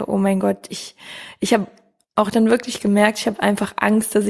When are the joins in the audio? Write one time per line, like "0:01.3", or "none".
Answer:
none